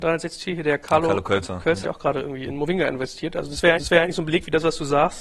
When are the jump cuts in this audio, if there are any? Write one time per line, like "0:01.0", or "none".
0:01.8
0:03.8